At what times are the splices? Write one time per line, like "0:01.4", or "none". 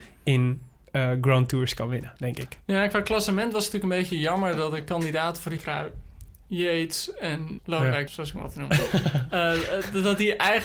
0:05.6
0:07.6
0:08.1